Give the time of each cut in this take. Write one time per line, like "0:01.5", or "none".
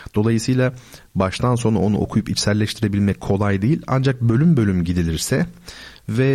none